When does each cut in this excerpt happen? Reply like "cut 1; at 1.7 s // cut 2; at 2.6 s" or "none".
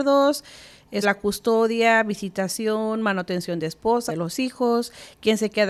cut 1; at 1.0 s // cut 2; at 4.1 s